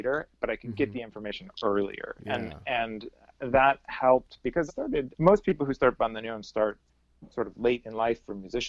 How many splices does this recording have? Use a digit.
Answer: 1